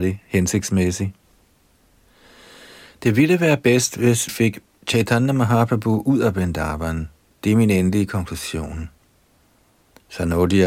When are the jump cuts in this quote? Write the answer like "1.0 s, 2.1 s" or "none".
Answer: 4.3 s